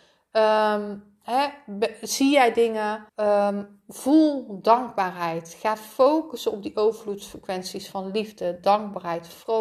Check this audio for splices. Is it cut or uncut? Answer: cut